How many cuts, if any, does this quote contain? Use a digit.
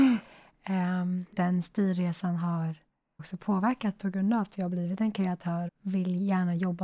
3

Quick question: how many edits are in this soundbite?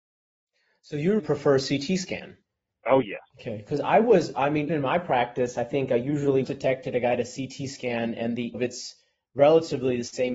6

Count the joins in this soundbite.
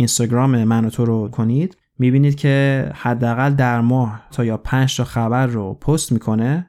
3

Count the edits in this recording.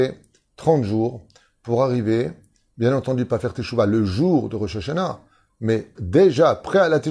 1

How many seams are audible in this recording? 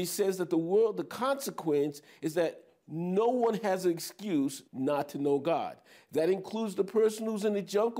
1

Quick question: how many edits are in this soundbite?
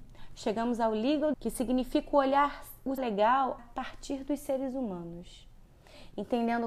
3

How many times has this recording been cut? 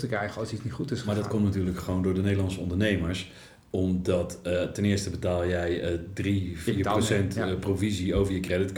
0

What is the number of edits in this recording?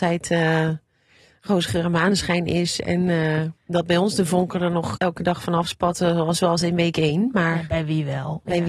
2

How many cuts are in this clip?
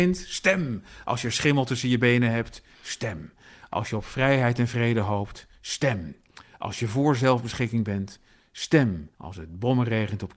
1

